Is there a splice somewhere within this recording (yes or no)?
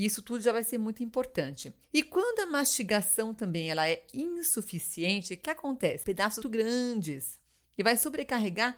yes